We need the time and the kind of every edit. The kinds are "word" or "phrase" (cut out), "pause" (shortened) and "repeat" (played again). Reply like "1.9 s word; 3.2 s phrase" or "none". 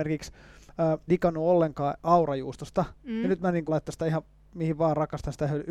1.1 s word; 3.7 s word